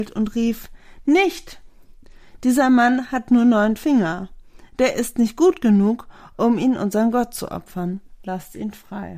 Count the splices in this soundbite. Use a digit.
0